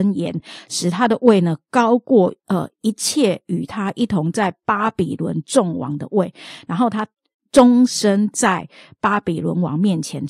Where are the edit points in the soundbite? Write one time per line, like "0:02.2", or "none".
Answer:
0:02.4